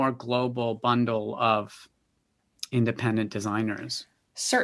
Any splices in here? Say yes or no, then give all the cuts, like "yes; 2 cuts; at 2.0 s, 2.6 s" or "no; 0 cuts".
no; 0 cuts